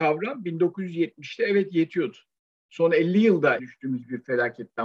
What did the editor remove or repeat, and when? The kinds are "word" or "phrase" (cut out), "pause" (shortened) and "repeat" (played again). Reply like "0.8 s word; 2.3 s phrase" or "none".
2.4 s pause; 3.6 s word